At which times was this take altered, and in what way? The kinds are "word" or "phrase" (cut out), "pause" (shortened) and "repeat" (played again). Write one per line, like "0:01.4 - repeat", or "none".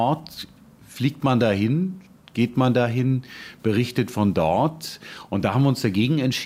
none